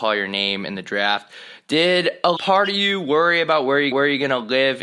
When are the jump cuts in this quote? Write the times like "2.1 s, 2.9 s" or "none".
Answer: 2.4 s, 3.9 s